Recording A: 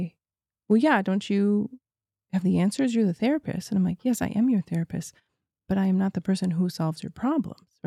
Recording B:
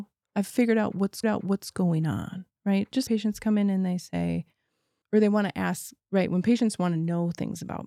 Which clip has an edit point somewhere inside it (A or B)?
B